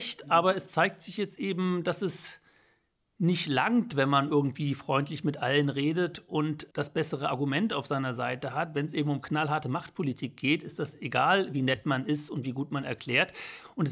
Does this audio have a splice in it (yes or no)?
no